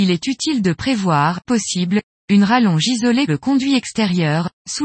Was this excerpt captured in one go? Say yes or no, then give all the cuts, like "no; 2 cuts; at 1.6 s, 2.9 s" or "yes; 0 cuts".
no; 2 cuts; at 1.5 s, 3.3 s